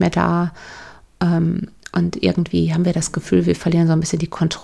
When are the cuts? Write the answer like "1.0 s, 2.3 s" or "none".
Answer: none